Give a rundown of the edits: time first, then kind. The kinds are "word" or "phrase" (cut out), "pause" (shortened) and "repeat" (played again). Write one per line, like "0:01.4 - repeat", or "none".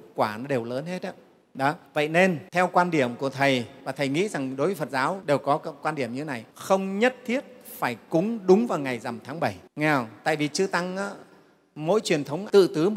0:01.9 - pause
0:02.5 - pause
0:03.8 - pause
0:06.5 - pause
0:09.7 - pause